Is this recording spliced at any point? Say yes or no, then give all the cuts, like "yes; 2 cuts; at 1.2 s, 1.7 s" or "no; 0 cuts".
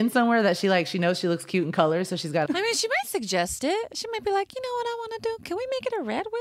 yes; 1 cut; at 2.5 s